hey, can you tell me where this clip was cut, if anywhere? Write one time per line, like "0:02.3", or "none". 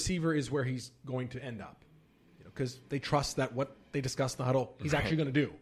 none